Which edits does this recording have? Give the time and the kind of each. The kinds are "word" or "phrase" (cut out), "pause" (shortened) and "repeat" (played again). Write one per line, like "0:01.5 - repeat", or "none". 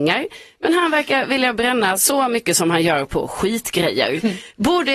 none